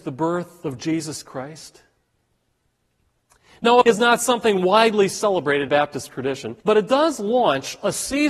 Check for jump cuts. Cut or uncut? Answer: cut